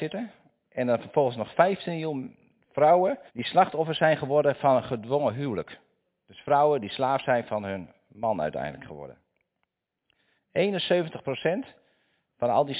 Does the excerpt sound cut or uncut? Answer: cut